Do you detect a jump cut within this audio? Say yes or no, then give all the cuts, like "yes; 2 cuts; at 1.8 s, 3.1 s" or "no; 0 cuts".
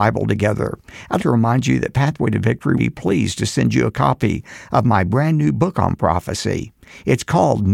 yes; 2 cuts; at 1.2 s, 2.8 s